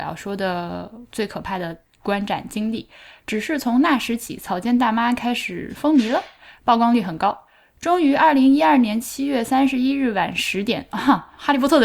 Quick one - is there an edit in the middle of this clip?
no; 0 cuts

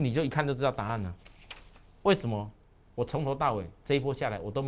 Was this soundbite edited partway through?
no; 0 cuts

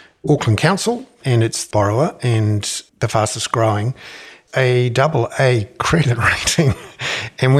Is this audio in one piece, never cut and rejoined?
no; 4 cuts; at 1.2 s, 1.7 s, 2.9 s, 4.5 s

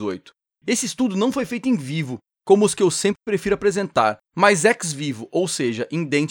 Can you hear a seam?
yes; 1 cut; at 4.3 s

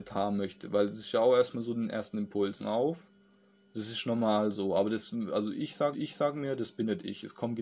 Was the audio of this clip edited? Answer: yes; 2 cuts; at 2.6 s, 5.9 s

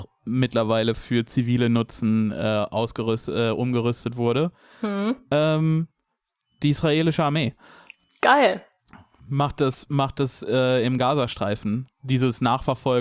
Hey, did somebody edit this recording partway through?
no; 0 cuts

